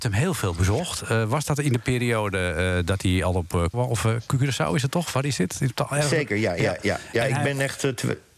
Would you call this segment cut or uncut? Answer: cut